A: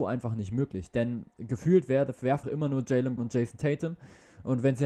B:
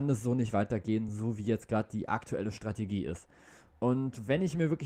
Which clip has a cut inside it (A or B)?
A